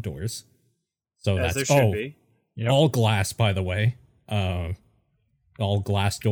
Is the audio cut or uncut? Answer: uncut